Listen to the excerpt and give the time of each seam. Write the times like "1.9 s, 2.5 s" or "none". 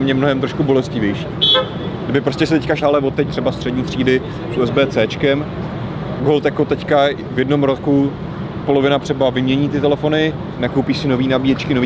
2.8 s, 3.3 s, 6.2 s, 8.6 s, 9.0 s